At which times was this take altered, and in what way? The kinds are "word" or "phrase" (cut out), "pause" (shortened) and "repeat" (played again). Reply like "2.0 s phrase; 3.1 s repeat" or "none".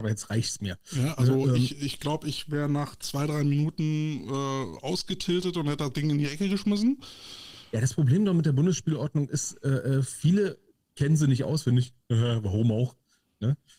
none